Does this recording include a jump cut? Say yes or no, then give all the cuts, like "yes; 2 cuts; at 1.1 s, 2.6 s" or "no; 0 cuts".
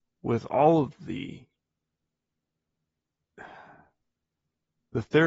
no; 0 cuts